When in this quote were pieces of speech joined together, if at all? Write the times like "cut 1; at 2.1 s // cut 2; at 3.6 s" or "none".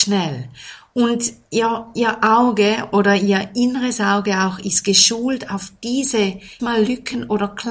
cut 1; at 6.6 s

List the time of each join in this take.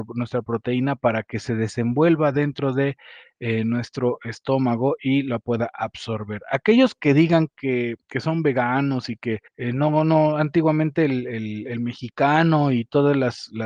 cut 1; at 8.0 s // cut 2; at 9.5 s

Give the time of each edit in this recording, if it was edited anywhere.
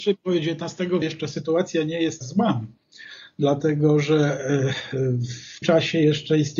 cut 1; at 1.0 s // cut 2; at 2.2 s // cut 3; at 5.6 s

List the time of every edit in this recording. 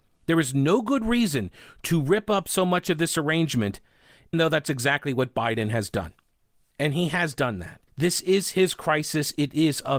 cut 1; at 4.3 s // cut 2; at 7.9 s

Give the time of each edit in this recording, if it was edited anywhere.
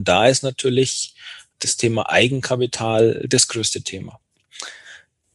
cut 1; at 1.5 s

